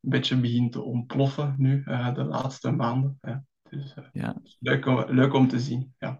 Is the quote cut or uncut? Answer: uncut